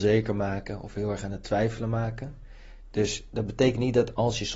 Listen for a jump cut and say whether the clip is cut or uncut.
uncut